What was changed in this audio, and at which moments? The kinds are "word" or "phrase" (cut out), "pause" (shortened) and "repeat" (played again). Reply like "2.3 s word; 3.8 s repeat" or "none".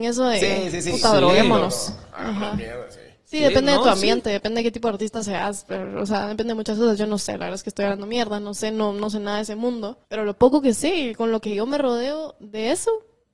10.0 s pause